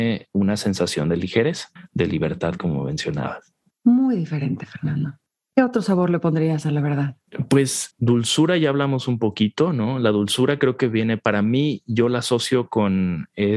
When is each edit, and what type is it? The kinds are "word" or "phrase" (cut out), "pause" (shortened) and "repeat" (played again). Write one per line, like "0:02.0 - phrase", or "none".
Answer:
0:07.9 - word

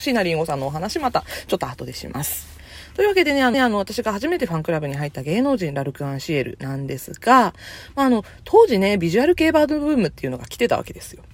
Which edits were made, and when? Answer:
0:03.5 - repeat

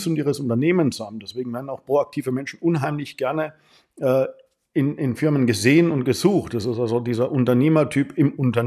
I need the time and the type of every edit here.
none

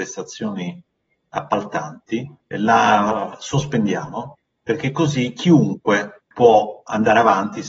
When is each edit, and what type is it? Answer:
0:02.4 - pause
0:06.3 - pause

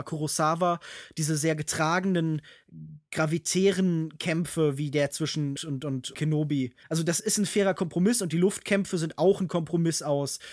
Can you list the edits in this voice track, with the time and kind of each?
0:05.6 - phrase
0:06.1 - word
0:06.8 - pause
0:07.2 - word

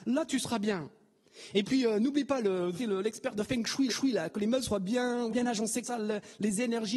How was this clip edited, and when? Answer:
0:02.8 - phrase
0:03.9 - repeat
0:05.3 - word
0:05.8 - word

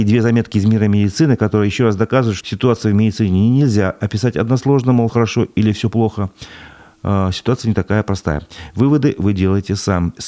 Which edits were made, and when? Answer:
0:02.4 - word
0:05.1 - word

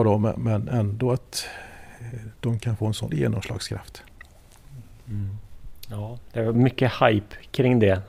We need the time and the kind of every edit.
0:02.4 - pause
0:03.1 - word
0:06.5 - word

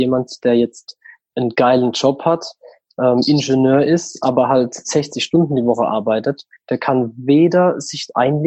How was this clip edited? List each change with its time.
none

